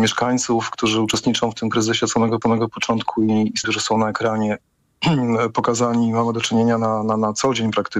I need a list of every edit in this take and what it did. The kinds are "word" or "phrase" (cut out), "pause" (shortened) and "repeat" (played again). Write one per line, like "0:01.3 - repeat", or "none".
0:02.4 - repeat
0:03.6 - phrase